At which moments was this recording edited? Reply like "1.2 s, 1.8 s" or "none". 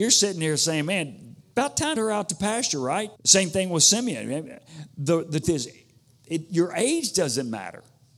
2.0 s, 3.2 s, 5.4 s